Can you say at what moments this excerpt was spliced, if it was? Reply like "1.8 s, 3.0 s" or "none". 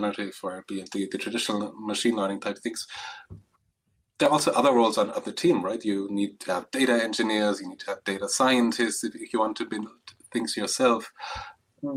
none